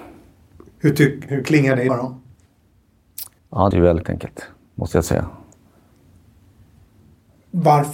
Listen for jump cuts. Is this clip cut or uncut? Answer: cut